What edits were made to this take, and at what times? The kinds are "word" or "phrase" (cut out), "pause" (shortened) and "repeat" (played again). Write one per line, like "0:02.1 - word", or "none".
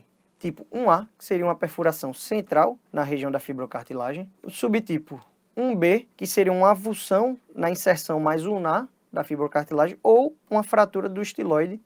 0:02.8 - pause
0:04.4 - pause
0:06.1 - pause
0:07.4 - pause